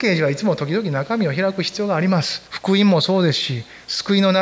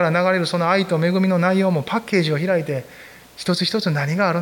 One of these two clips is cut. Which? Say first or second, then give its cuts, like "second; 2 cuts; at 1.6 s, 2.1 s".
first; 1 cut; at 2.5 s